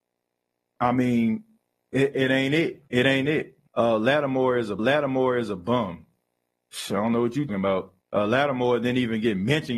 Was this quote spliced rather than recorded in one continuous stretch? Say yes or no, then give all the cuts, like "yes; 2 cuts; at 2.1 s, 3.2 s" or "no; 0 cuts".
yes; 6 cuts; at 2.1 s, 2.9 s, 3.7 s, 4.8 s, 7.5 s, 8.0 s